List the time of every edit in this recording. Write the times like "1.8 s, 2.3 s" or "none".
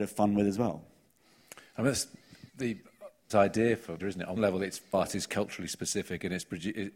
2.5 s, 3.3 s, 4.0 s, 4.4 s, 4.9 s